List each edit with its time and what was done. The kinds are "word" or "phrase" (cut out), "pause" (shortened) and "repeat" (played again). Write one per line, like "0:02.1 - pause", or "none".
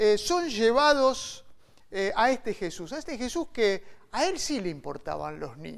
none